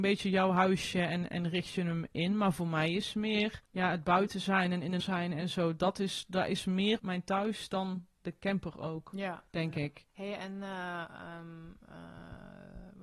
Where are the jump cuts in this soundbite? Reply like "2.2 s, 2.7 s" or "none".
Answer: 3.7 s, 5.0 s, 7.0 s, 9.5 s, 10.1 s